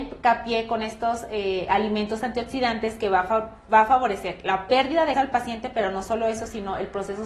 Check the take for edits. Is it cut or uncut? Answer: cut